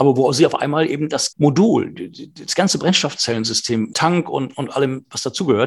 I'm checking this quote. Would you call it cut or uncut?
cut